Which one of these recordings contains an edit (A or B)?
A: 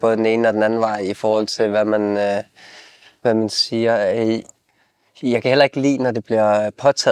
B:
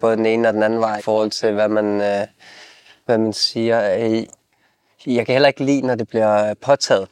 B